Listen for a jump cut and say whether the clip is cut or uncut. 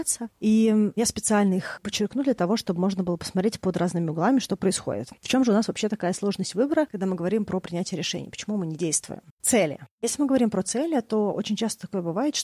cut